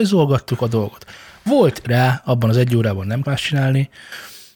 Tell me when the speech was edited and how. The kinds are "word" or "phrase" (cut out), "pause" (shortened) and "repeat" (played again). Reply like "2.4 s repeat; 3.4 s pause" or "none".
1.8 s word; 3.2 s word